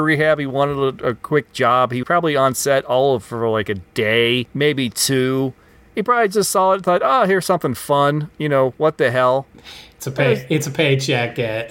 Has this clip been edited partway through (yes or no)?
yes